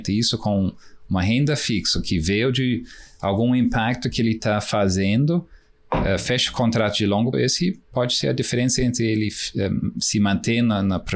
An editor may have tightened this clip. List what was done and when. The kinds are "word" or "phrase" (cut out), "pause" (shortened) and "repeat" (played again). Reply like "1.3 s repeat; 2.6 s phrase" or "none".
7.3 s word